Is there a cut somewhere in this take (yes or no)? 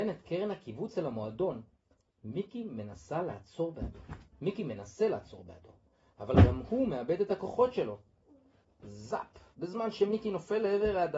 no